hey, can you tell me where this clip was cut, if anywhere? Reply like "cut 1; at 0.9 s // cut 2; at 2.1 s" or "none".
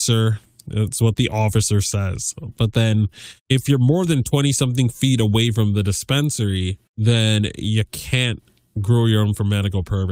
cut 1; at 3.4 s // cut 2; at 6.9 s